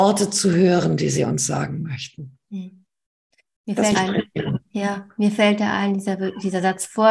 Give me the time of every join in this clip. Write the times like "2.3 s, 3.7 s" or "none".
2.4 s, 3.9 s, 4.7 s